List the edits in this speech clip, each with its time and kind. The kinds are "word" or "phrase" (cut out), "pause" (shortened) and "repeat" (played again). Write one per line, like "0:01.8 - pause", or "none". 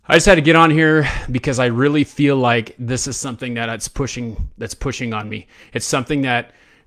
none